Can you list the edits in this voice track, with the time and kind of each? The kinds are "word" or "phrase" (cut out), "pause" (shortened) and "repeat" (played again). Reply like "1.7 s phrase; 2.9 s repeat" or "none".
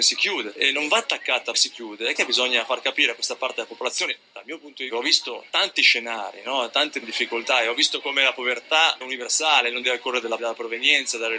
1.5 s word; 2.1 s word; 4.9 s word; 7.0 s word; 9.0 s word; 9.8 s word; 10.4 s word